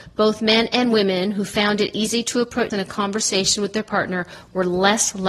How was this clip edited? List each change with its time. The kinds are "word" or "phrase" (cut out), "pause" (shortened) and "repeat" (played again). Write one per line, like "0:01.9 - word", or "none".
0:02.7 - word